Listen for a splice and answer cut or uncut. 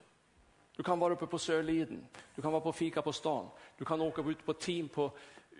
uncut